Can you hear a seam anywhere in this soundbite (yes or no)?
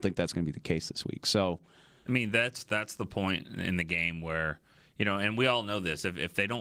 no